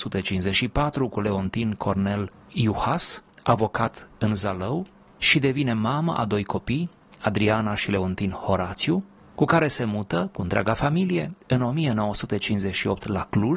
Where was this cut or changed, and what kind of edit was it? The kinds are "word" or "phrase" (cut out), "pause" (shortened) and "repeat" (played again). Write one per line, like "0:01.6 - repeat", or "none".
none